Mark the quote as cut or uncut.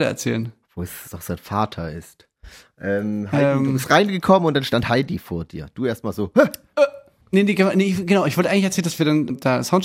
uncut